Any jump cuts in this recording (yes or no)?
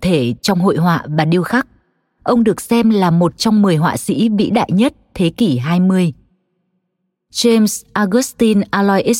no